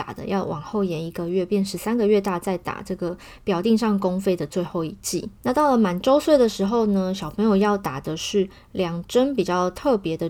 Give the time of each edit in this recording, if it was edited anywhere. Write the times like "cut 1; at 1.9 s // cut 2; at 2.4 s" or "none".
cut 1; at 5.4 s